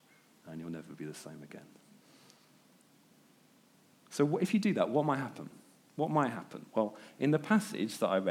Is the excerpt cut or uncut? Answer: uncut